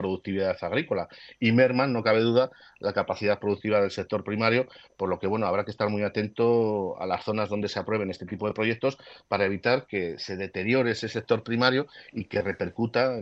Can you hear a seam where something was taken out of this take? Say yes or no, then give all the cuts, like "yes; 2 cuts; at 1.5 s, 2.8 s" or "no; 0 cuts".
no; 0 cuts